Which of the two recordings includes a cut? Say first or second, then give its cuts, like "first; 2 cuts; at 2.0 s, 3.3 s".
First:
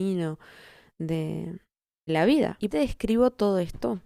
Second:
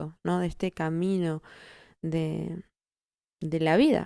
first; 2 cuts; at 2.1 s, 2.7 s